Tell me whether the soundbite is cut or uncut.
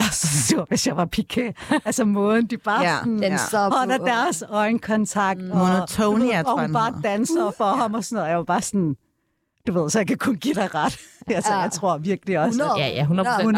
uncut